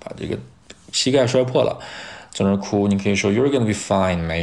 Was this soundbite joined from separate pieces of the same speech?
no; 0 cuts

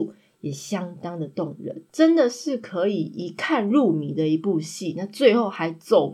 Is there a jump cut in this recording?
yes; 1 cut; at 1.9 s

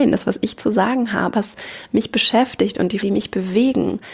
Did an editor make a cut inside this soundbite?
yes; 2 cuts; at 1.3 s, 3.0 s

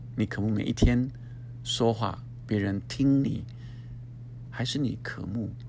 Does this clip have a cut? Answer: yes; 1 cut; at 4.5 s

